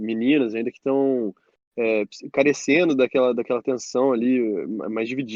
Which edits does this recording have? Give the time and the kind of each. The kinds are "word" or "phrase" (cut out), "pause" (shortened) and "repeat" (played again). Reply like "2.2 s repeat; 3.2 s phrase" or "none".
none